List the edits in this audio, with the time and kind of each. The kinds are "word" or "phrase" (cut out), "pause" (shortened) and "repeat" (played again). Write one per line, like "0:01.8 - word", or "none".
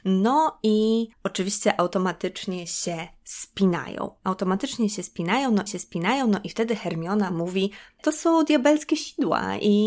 0:01.1 - pause
0:05.7 - repeat
0:08.0 - word

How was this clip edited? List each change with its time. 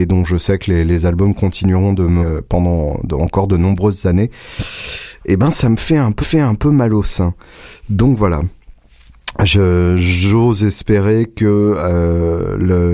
0:02.2 - word
0:06.2 - repeat

